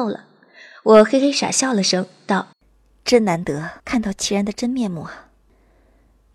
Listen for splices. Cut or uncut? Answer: cut